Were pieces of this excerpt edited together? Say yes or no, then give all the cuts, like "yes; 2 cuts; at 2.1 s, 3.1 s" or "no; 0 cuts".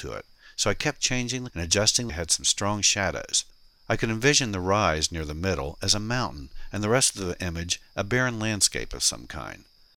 yes; 2 cuts; at 1.5 s, 2.1 s